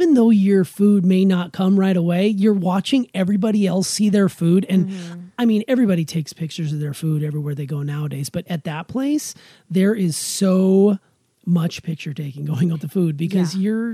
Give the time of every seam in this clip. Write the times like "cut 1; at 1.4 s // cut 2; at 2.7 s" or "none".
cut 1; at 8.5 s // cut 2; at 12.7 s